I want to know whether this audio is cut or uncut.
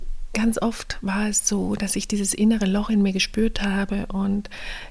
uncut